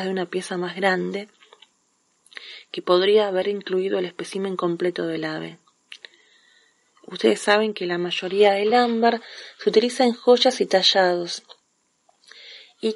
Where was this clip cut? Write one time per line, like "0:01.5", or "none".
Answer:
none